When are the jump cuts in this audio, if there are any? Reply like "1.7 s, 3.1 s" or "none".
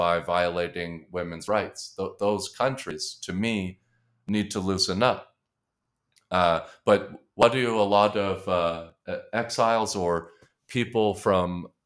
none